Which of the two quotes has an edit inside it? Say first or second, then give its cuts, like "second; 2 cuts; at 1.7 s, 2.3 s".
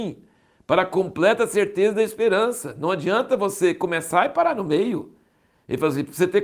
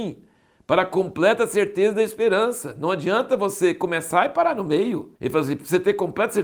second; 1 cut; at 5.1 s